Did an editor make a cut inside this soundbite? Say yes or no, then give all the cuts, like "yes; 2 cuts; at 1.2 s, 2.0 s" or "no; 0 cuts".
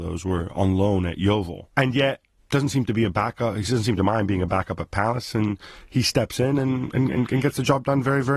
no; 0 cuts